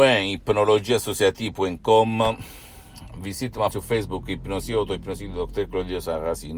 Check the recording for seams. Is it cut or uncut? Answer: cut